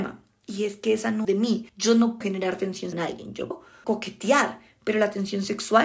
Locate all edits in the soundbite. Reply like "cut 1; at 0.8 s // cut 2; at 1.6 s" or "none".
cut 1; at 1.2 s // cut 2; at 1.7 s // cut 3; at 2.2 s // cut 4; at 2.9 s // cut 5; at 3.5 s // cut 6; at 3.8 s